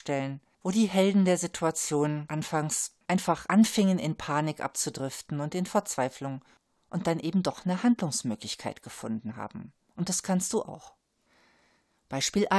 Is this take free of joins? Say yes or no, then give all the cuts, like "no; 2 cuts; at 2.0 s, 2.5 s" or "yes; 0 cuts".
yes; 0 cuts